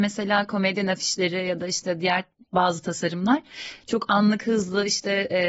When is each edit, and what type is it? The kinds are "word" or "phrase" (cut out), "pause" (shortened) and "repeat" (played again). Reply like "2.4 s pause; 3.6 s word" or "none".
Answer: none